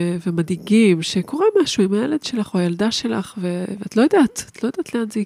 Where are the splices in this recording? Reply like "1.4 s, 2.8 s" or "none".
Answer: none